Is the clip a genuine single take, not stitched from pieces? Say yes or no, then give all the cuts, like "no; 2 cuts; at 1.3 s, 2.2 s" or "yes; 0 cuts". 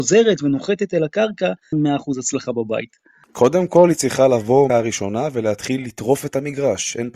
no; 3 cuts; at 1.7 s, 3.2 s, 4.7 s